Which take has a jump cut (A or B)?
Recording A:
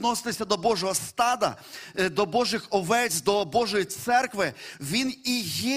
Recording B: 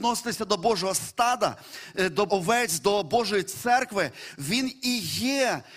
B